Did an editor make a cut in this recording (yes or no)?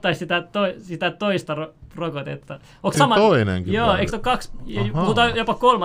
yes